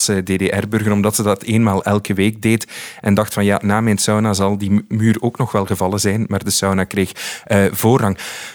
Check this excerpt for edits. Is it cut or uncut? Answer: uncut